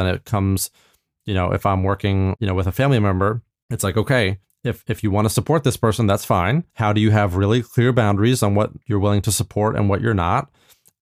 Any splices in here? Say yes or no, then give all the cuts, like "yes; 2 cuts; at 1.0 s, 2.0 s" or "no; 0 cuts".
yes; 4 cuts; at 3.5 s, 4.4 s, 6.7 s, 8.8 s